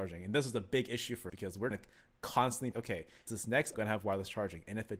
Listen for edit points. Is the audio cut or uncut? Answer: cut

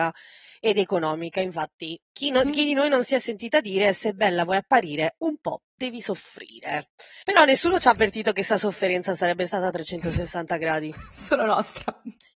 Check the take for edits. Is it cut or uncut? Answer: cut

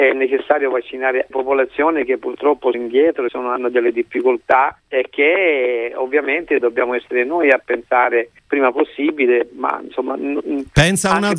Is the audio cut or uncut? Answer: cut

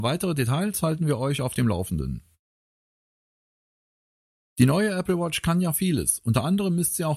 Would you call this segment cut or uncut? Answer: uncut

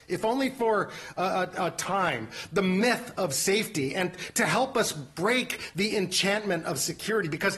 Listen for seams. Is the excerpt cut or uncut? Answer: uncut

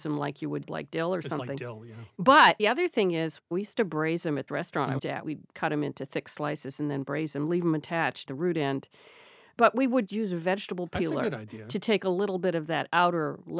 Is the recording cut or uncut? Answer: cut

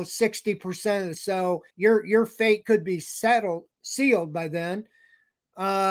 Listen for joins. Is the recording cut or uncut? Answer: cut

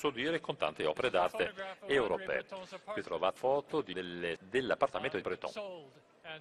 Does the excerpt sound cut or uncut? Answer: cut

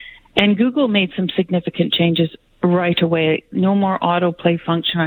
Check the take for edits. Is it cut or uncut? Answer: uncut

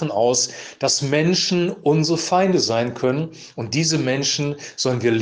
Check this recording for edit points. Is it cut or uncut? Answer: uncut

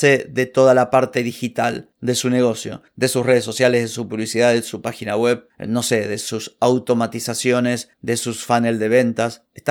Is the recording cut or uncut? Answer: uncut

